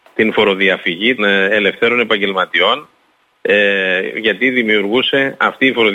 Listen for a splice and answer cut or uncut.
cut